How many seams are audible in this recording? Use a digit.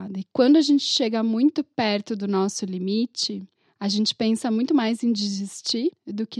0